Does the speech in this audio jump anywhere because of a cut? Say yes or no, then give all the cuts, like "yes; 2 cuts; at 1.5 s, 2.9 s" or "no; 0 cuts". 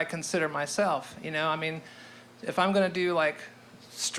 no; 0 cuts